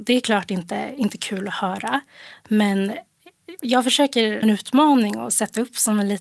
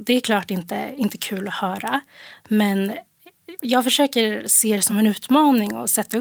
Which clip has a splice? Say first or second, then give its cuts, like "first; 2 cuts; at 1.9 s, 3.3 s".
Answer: first; 1 cut; at 4.4 s